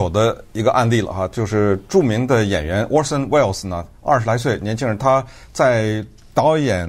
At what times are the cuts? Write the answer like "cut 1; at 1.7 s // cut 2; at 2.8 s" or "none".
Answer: none